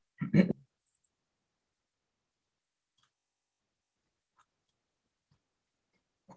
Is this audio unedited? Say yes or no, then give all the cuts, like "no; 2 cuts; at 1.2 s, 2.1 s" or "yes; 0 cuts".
yes; 0 cuts